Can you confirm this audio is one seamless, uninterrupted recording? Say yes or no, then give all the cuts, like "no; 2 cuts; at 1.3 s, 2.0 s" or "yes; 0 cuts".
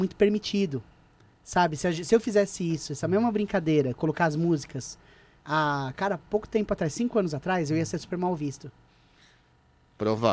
yes; 0 cuts